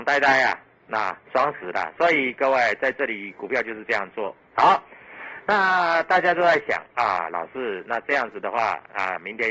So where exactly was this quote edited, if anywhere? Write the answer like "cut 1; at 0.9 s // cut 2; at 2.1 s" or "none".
cut 1; at 1.3 s